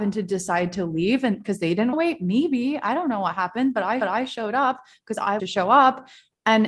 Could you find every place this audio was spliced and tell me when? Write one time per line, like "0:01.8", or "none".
0:01.9
0:04.0
0:05.4